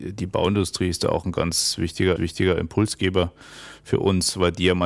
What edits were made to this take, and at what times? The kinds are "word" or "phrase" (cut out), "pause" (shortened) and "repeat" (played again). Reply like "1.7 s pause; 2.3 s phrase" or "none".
2.2 s repeat